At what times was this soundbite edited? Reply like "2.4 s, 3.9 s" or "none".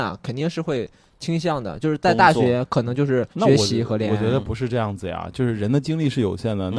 3.3 s

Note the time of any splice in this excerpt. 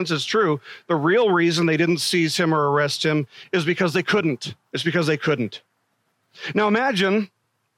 4.6 s

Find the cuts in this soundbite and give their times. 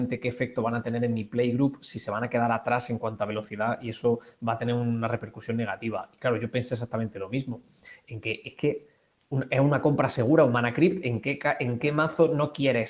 none

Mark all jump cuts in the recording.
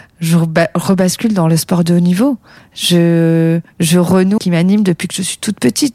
4.4 s

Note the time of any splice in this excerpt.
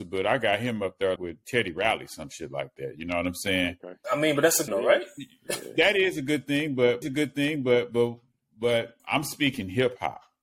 1.2 s, 4.7 s, 7.0 s, 9.0 s

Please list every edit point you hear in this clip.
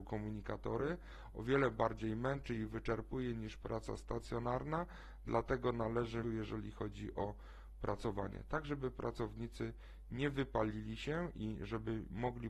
6.2 s

